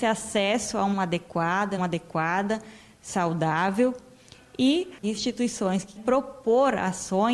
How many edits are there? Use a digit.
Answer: 4